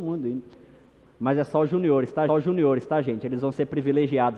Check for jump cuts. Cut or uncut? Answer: cut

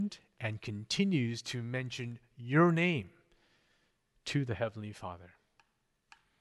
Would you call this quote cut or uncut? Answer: uncut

